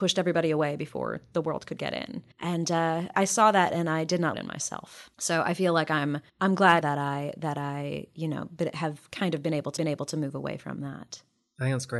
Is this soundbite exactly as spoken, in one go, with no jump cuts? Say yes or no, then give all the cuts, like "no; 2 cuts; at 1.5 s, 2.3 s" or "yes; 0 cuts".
no; 7 cuts; at 2.3 s, 3.1 s, 4.3 s, 5.1 s, 6.3 s, 6.8 s, 9.8 s